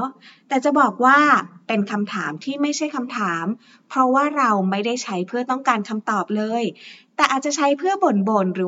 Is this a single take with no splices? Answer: yes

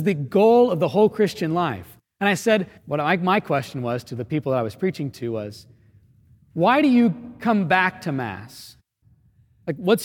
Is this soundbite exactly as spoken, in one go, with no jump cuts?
no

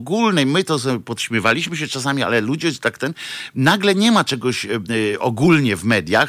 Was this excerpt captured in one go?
yes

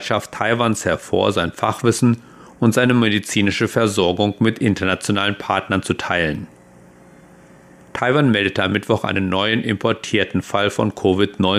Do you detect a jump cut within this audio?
no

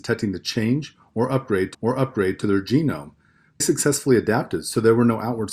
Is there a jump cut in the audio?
yes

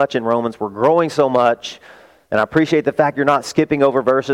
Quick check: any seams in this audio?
no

